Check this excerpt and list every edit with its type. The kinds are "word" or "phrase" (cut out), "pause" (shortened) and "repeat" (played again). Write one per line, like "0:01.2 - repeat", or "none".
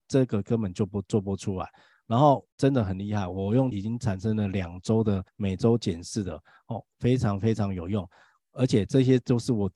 0:02.5 - pause
0:03.7 - word
0:05.3 - pause